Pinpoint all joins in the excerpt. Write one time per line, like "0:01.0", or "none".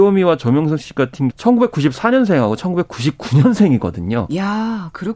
0:01.3